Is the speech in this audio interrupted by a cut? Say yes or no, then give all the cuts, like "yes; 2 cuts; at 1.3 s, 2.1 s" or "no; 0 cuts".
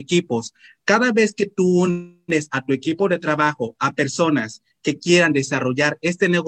no; 0 cuts